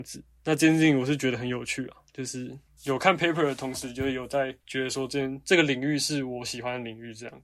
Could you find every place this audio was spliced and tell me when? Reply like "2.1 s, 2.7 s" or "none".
2.7 s, 4.6 s